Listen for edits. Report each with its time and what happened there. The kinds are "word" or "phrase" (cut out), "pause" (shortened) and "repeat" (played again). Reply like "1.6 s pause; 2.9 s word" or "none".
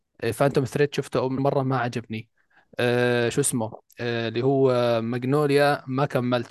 1.4 s word